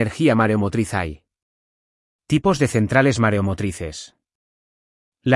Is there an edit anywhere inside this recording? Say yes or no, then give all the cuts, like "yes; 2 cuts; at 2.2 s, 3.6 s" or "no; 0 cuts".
no; 0 cuts